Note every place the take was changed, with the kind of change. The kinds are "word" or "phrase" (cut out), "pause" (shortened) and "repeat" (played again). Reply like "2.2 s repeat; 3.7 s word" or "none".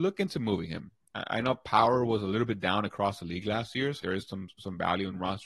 4.0 s word